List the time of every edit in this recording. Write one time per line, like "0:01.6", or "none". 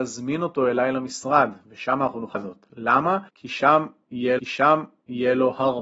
0:02.3
0:03.3
0:04.4